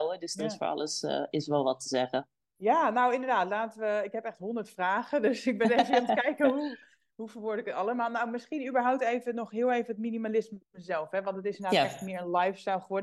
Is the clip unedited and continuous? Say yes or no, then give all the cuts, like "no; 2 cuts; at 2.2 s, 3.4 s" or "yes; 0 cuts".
yes; 0 cuts